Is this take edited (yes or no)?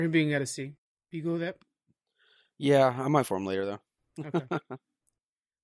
yes